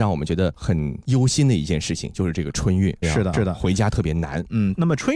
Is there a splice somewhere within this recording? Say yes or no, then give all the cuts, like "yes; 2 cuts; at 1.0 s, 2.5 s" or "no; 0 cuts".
yes; 2 cuts; at 3.0 s, 3.3 s